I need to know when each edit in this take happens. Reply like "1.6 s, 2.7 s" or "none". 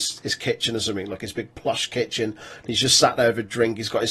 none